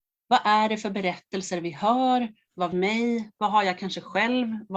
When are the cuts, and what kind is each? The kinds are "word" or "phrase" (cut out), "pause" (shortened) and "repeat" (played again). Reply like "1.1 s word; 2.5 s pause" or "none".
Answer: 2.7 s phrase